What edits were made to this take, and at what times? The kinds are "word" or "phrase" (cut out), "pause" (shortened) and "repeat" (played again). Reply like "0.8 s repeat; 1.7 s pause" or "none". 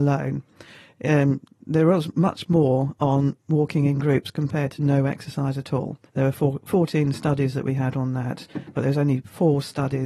6.1 s pause